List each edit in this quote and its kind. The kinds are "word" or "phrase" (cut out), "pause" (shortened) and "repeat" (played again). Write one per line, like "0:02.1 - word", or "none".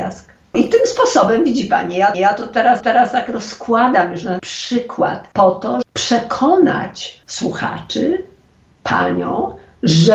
0:02.1 - repeat
0:02.8 - repeat
0:04.4 - word
0:05.3 - pause
0:05.8 - word
0:07.2 - pause

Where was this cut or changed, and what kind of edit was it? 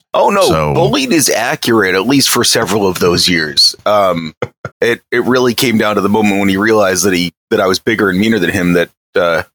0:04.7 - pause

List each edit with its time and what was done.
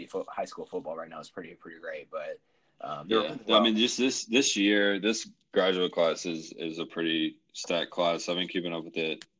none

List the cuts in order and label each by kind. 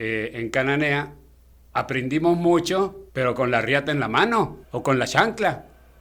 0:03.1 - pause
0:04.6 - pause

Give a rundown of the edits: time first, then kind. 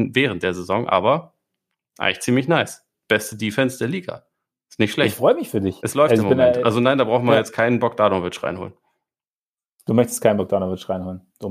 none

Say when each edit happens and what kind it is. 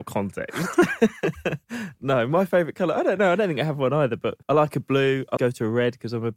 0:04.4 - pause
0:05.4 - word

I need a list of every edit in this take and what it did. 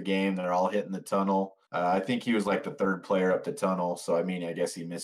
0:01.6 - pause

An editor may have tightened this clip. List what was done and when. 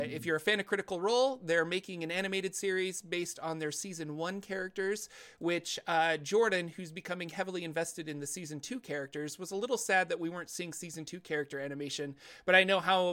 none

